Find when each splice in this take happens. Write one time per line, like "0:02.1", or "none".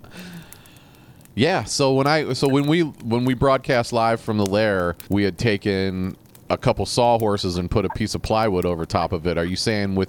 0:05.1
0:06.3